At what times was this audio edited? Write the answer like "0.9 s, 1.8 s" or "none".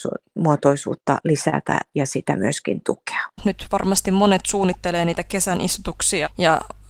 3.3 s